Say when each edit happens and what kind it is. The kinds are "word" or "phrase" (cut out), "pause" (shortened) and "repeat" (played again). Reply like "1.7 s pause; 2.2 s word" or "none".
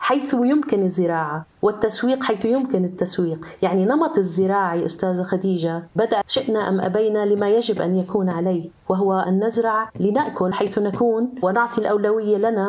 6.2 s word; 10.5 s phrase